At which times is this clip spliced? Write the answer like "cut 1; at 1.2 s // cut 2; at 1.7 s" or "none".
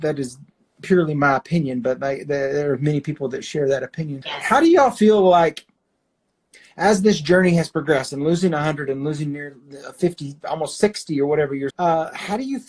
cut 1; at 4.2 s // cut 2; at 11.7 s